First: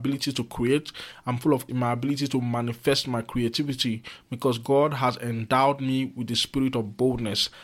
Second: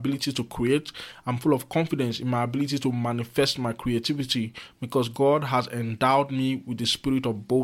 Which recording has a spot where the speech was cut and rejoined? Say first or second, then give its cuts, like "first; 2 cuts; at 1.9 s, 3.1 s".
first; 1 cut; at 1.7 s